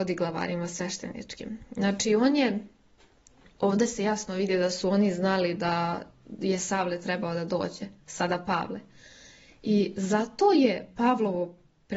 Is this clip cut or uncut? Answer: uncut